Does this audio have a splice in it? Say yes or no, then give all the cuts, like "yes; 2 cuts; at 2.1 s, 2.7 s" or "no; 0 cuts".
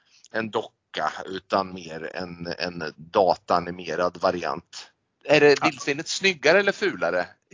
no; 0 cuts